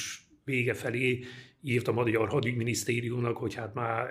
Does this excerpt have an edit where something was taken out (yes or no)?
no